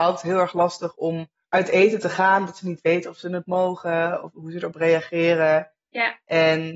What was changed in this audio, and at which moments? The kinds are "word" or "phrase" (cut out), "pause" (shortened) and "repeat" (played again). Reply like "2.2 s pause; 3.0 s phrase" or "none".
1.4 s pause